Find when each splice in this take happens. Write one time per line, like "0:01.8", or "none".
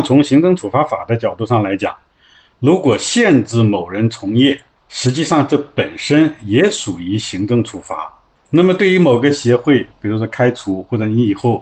none